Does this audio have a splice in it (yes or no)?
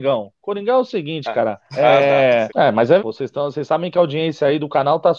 yes